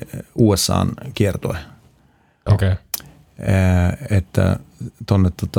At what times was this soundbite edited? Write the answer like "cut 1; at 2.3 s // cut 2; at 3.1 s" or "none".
none